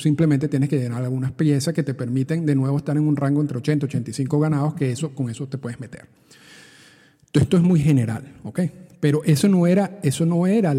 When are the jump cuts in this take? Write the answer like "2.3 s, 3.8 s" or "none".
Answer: none